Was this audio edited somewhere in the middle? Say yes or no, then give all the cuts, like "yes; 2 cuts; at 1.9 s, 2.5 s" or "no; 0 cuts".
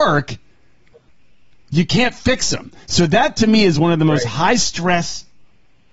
no; 0 cuts